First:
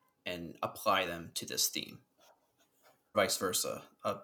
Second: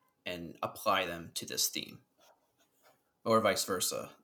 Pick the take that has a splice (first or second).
first